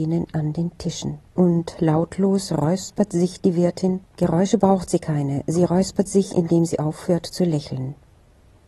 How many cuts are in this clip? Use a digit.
2